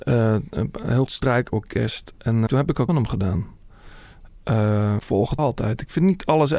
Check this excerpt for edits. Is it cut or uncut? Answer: cut